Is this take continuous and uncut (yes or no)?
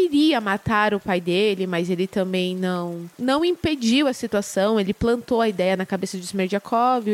no